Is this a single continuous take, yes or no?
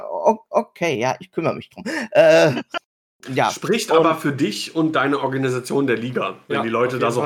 yes